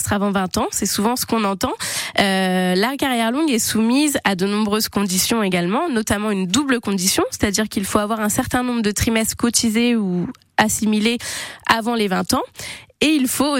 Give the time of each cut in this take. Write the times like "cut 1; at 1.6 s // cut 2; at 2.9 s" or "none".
none